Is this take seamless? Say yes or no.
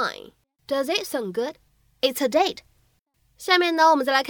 yes